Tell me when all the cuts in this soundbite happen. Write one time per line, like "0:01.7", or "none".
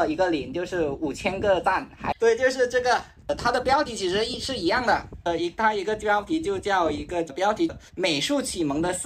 0:07.9